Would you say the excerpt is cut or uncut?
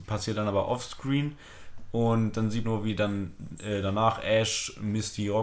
cut